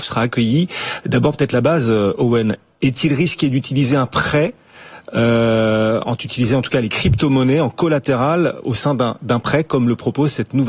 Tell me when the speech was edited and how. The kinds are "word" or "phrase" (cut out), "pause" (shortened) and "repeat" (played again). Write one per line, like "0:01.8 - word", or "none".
none